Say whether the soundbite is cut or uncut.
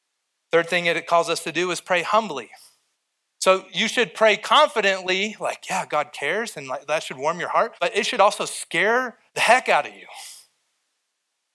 cut